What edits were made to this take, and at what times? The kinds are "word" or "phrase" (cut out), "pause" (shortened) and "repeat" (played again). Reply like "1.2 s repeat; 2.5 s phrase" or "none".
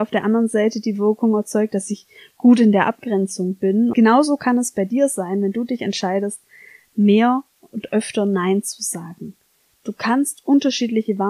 3.9 s phrase